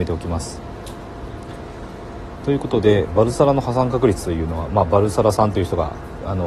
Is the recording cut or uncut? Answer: uncut